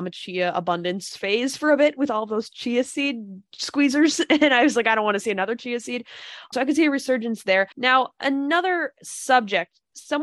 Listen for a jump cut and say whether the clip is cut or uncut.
cut